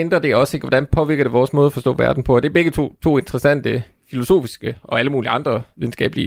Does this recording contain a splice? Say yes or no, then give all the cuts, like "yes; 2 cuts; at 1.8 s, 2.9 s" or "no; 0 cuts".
no; 0 cuts